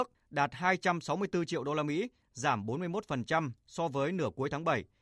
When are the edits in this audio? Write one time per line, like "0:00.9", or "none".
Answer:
none